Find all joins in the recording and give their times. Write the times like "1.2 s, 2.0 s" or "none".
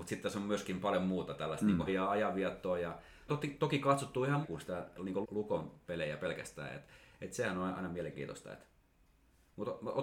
1.9 s, 3.3 s, 4.4 s, 5.2 s